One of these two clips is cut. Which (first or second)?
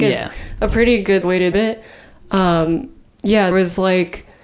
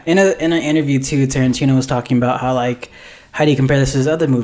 first